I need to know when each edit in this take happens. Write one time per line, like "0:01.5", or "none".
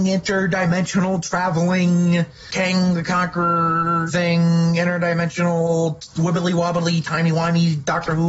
0:04.1

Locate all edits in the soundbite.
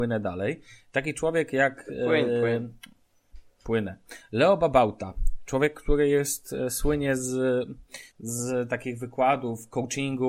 0:08.1

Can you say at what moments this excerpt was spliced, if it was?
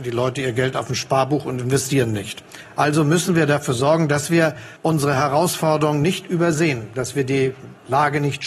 0:04.8

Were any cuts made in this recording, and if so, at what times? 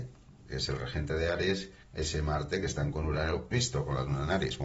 0:01.8
0:02.9
0:03.5

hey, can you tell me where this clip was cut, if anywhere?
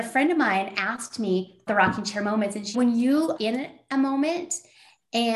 0:01.7
0:02.7
0:03.4

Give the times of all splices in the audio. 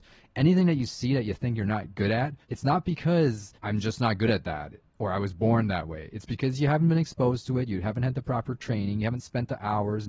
0:02.4
0:03.6

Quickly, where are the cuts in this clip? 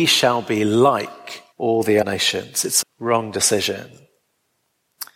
0:01.5
0:02.0
0:02.8

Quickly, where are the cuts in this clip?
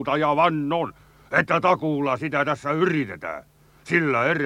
none

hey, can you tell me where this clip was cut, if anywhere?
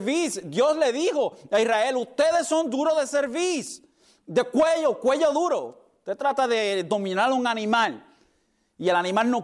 none

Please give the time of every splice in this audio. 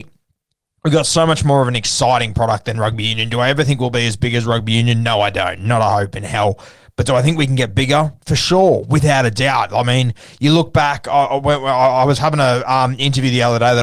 none

